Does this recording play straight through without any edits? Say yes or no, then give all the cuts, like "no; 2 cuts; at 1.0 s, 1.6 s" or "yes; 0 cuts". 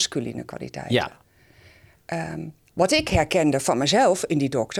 yes; 0 cuts